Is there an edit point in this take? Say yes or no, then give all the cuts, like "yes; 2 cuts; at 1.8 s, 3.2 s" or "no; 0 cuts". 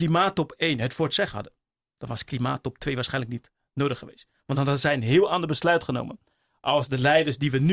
no; 0 cuts